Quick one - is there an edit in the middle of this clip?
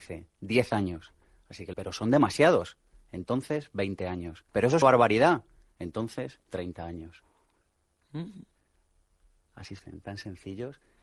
yes; 4 cuts; at 1.7 s, 4.5 s, 4.8 s, 9.8 s

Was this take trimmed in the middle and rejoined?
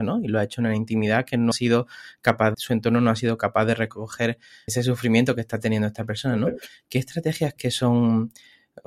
yes; 4 cuts; at 1.5 s, 2.5 s, 4.7 s, 7.6 s

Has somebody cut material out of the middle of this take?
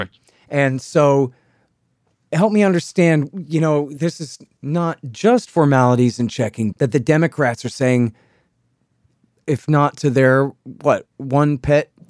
yes; 1 cut; at 6.7 s

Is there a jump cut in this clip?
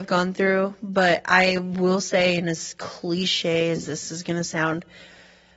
no; 0 cuts

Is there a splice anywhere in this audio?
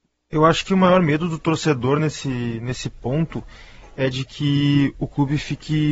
no; 0 cuts

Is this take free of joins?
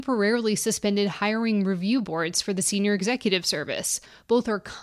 yes; 0 cuts

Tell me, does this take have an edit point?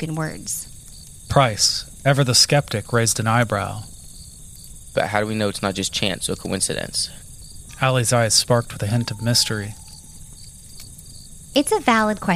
no; 0 cuts

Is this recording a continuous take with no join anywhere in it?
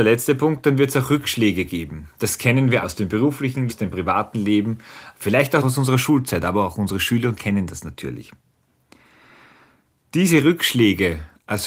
no; 4 cuts; at 2.8 s, 3.7 s, 5.6 s, 7.4 s

